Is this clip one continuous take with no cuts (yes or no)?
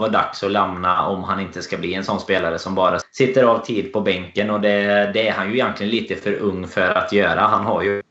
no